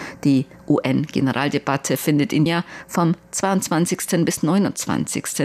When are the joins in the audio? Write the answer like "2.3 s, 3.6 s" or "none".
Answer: 2.5 s